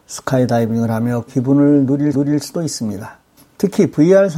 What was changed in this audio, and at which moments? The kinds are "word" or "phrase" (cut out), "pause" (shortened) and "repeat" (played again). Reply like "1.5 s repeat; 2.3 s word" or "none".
1.3 s word; 2.1 s repeat; 3.4 s pause